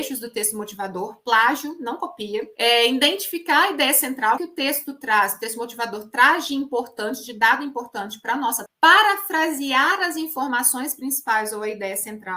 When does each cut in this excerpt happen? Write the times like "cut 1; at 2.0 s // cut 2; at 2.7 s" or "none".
cut 1; at 2.5 s // cut 2; at 4.4 s // cut 3; at 8.7 s